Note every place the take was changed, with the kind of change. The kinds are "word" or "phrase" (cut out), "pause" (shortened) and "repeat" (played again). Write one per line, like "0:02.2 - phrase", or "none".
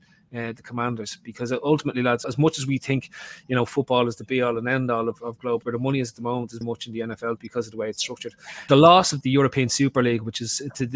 0:02.2 - word
0:05.6 - word
0:06.6 - word
0:07.4 - word
0:08.7 - word
0:09.2 - word